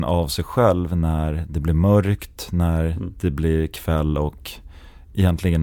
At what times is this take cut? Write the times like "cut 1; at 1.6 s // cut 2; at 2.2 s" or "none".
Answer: none